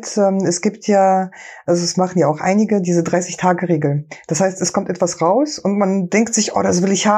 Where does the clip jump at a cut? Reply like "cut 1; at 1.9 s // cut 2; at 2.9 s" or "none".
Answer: none

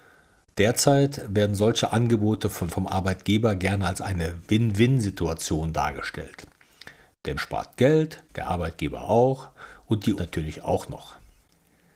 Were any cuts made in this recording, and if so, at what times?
cut 1; at 2.7 s // cut 2; at 7.4 s // cut 3; at 8.3 s // cut 4; at 10.2 s

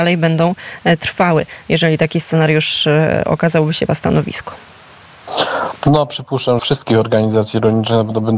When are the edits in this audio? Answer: cut 1; at 3.9 s // cut 2; at 6.6 s

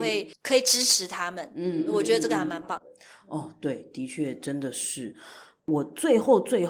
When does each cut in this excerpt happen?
none

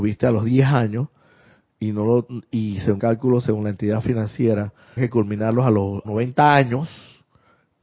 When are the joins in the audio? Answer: cut 1; at 3.0 s // cut 2; at 5.0 s // cut 3; at 6.0 s

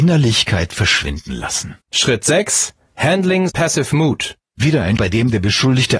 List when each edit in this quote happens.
cut 1; at 1.8 s // cut 2; at 3.5 s // cut 3; at 4.5 s // cut 4; at 5.0 s

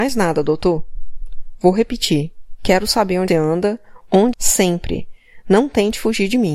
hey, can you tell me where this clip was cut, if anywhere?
cut 1; at 3.3 s // cut 2; at 4.3 s

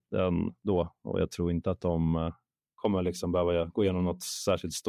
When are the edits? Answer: none

